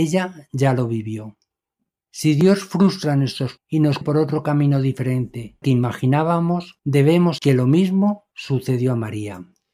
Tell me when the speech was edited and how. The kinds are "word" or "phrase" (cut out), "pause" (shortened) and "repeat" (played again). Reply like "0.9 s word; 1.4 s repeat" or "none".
3.6 s word; 4.0 s word; 5.6 s word; 7.4 s word